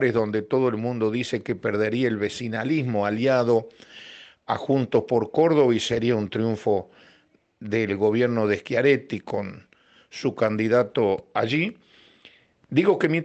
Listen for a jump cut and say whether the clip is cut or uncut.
uncut